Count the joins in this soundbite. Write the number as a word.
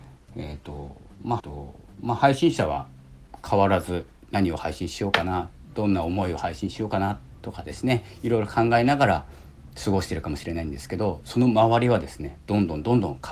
one